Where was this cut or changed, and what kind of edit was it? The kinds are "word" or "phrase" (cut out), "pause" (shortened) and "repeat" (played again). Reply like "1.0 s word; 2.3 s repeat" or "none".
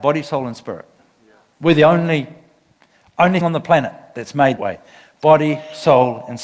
3.4 s word; 4.6 s word